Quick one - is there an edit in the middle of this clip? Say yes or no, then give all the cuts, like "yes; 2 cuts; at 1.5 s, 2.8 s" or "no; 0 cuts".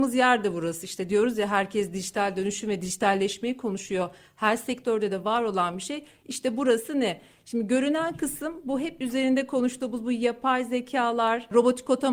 no; 0 cuts